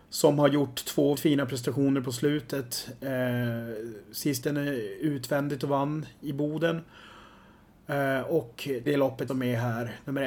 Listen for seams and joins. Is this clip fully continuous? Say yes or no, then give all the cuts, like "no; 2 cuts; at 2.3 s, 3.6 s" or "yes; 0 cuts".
no; 4 cuts; at 1.1 s, 4.4 s, 8.9 s, 9.3 s